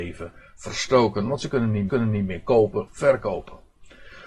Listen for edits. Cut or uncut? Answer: cut